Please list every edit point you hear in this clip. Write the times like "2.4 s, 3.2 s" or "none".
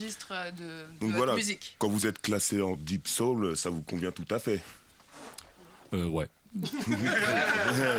none